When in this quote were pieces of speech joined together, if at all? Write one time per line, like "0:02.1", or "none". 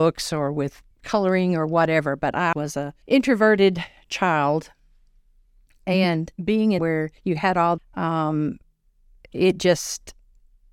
0:00.9
0:02.5
0:03.0
0:06.3
0:06.8
0:07.2
0:07.8